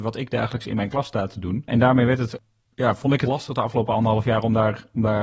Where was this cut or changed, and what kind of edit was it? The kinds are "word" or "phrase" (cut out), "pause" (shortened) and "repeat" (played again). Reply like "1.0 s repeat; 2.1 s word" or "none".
3.3 s word